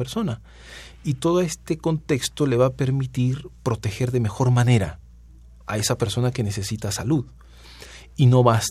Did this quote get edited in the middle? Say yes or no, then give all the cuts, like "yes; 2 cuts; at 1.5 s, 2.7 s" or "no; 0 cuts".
no; 0 cuts